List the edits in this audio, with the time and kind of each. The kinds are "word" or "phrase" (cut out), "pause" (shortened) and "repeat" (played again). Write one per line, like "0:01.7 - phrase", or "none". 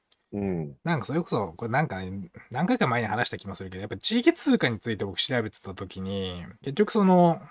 0:06.6 - phrase